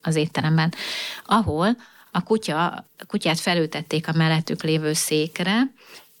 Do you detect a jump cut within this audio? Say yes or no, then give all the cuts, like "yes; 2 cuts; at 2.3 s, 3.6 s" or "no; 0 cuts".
no; 0 cuts